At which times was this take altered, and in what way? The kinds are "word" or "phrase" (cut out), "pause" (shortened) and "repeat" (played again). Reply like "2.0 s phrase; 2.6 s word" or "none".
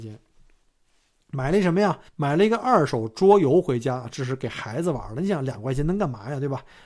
2.1 s pause